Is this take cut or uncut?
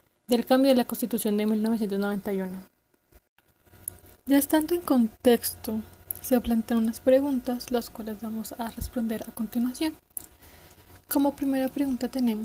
uncut